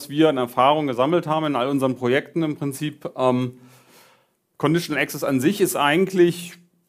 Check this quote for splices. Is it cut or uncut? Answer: uncut